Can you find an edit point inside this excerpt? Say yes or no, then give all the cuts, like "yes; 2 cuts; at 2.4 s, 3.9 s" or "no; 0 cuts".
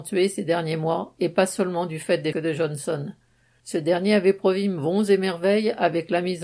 yes; 1 cut; at 2.3 s